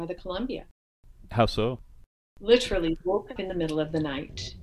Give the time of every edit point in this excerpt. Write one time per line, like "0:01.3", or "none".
0:03.4